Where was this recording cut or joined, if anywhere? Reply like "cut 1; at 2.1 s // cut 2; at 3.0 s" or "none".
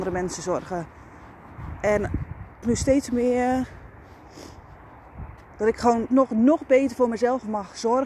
cut 1; at 2.6 s // cut 2; at 6.1 s